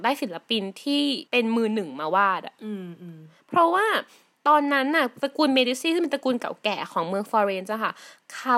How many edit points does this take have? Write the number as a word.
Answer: one